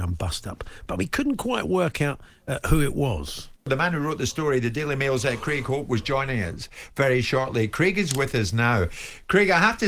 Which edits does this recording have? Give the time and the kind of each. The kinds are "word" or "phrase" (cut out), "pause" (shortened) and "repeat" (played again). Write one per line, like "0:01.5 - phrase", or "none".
0:03.6 - pause

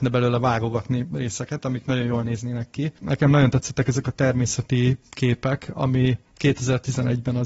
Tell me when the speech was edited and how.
none

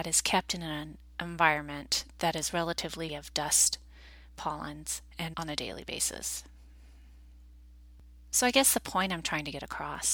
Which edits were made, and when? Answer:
0:03.1 - word
0:05.3 - word

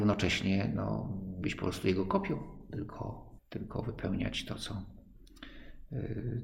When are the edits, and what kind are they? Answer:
0:01.4 - word
0:03.4 - pause

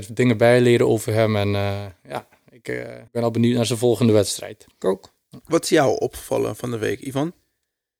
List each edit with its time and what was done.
0:03.1 - pause
0:04.7 - pause
0:05.4 - pause

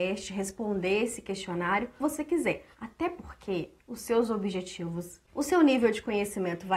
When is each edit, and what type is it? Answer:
0:02.0 - word
0:03.8 - pause
0:05.2 - word

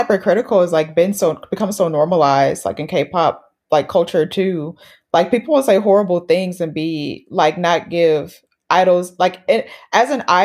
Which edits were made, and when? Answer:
none

